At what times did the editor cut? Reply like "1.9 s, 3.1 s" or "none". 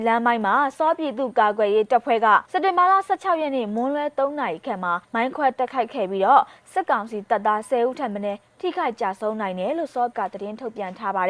2.4 s, 5.0 s, 10.1 s